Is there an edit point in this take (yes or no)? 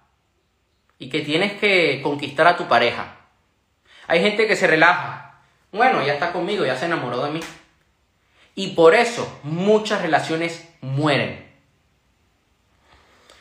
no